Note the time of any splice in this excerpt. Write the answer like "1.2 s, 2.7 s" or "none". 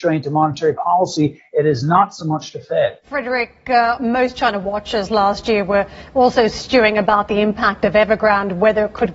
3.0 s